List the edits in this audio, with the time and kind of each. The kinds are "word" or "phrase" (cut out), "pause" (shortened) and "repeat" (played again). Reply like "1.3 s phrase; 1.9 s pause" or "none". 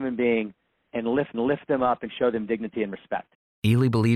1.3 s repeat